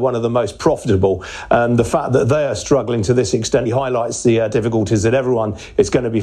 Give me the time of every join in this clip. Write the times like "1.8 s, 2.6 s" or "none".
3.7 s